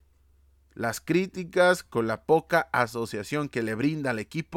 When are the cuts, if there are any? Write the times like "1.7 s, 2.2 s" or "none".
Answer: none

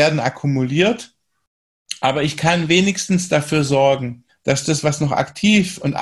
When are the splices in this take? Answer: 4.3 s

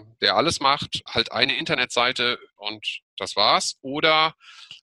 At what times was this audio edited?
1.1 s, 2.6 s

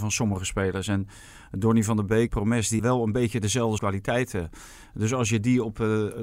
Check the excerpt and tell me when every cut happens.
2.3 s, 2.8 s, 3.8 s

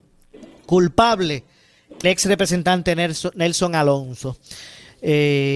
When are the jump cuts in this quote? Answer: 2.0 s

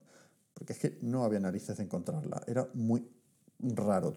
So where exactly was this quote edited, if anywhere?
none

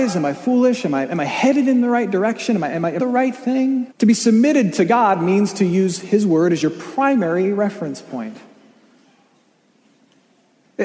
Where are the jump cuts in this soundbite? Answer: 3.0 s, 3.9 s

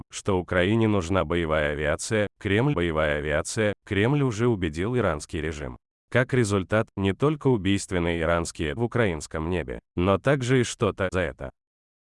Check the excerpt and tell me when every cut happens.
2.7 s, 6.0 s, 8.8 s, 9.8 s, 11.1 s

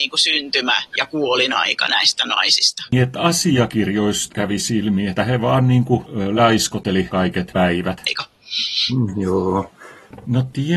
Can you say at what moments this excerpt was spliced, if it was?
none

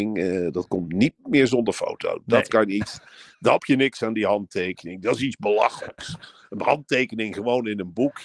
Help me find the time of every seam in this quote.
3.6 s

